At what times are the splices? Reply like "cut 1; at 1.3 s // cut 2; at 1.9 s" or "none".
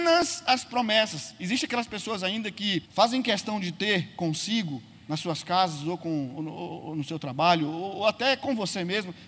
cut 1; at 2.9 s